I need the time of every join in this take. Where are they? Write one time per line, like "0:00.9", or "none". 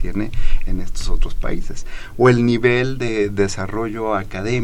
none